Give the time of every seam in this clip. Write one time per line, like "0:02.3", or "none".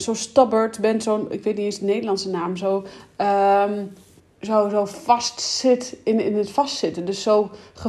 0:04.2